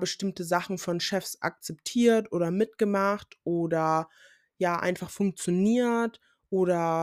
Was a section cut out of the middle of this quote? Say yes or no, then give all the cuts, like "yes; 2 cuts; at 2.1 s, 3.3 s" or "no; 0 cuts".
no; 0 cuts